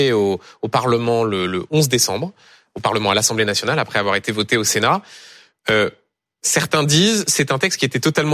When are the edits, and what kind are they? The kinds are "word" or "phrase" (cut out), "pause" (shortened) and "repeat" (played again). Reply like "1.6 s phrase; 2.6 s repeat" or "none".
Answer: none